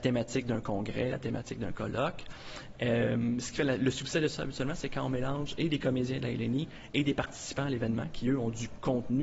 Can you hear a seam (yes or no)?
no